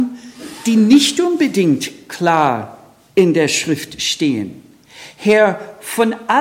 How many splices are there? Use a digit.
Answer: 0